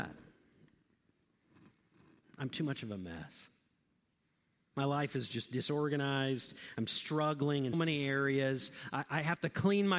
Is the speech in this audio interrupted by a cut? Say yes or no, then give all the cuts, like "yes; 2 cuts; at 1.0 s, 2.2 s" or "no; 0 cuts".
yes; 1 cut; at 7.7 s